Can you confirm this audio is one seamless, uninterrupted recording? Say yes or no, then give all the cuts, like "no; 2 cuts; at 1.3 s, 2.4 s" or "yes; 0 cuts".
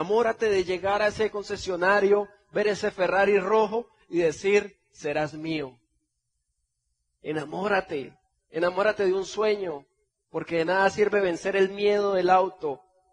yes; 0 cuts